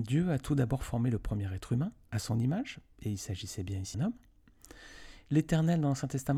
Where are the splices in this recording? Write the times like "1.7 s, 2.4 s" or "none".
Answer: 2.1 s, 3.9 s

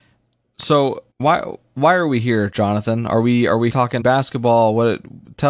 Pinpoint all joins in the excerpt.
1.1 s, 3.7 s, 4.0 s

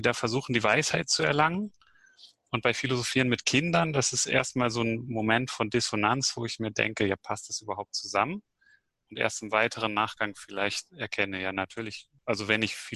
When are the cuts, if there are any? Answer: none

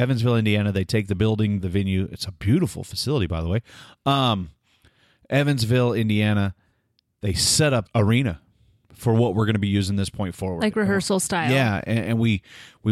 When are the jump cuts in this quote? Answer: 1.6 s, 7.9 s

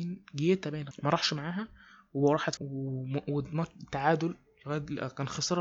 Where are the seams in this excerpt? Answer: 0.9 s, 2.6 s

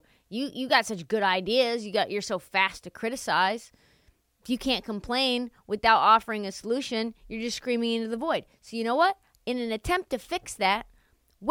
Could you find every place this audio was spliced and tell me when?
none

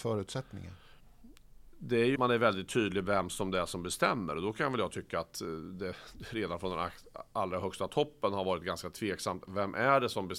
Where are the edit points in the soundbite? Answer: 2.2 s

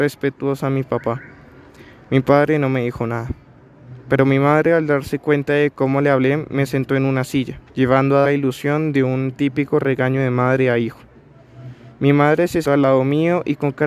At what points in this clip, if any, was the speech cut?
7.7 s, 8.2 s, 12.6 s

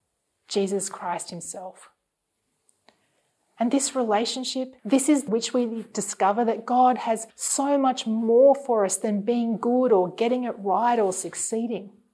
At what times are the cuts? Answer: 4.8 s, 5.3 s, 7.3 s

